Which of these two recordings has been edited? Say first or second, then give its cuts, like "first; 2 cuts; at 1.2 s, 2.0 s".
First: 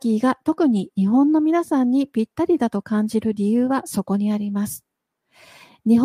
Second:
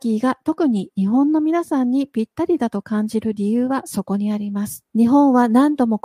second; 1 cut; at 4.9 s